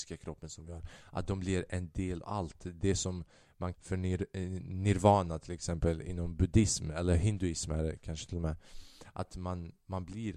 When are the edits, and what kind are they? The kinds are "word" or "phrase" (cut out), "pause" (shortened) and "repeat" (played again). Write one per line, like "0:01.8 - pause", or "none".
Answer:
0:02.2 - word
0:03.7 - word